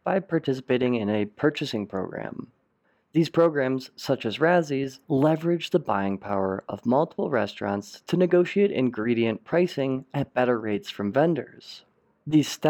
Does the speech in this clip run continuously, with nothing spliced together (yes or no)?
yes